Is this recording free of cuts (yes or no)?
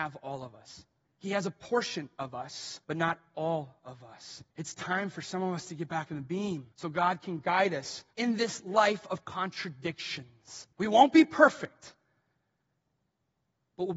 no